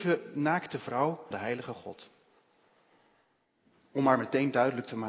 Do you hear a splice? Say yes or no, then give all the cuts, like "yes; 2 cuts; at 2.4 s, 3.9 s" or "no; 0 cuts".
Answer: yes; 1 cut; at 1.3 s